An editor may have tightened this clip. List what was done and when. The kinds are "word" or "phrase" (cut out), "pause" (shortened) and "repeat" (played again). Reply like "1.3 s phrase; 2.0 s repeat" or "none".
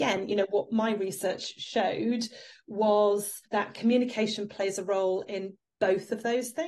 3.4 s pause